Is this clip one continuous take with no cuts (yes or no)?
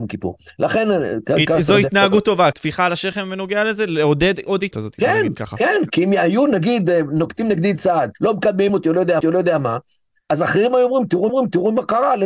no